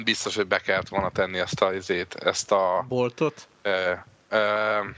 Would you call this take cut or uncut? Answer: uncut